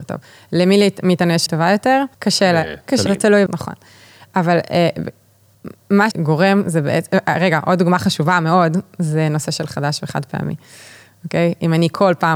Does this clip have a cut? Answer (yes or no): yes